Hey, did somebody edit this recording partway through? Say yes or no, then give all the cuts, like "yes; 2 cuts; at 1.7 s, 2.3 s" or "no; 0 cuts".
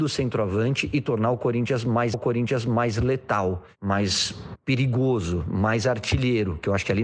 yes; 1 cut; at 2.1 s